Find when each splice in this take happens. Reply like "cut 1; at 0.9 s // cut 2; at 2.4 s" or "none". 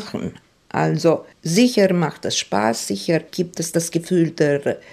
none